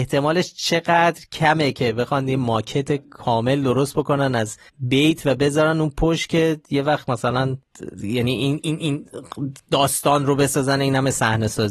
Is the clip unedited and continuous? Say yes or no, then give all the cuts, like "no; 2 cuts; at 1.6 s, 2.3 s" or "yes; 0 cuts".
no; 1 cut; at 4.7 s